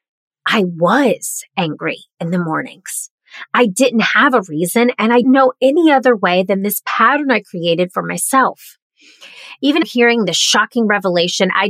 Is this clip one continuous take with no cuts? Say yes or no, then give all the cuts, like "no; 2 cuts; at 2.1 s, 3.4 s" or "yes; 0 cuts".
no; 2 cuts; at 5.2 s, 9.8 s